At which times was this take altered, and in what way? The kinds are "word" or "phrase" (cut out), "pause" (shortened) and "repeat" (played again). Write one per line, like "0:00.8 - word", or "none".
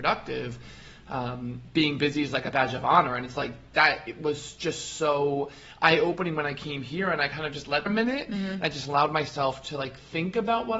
0:07.9 - phrase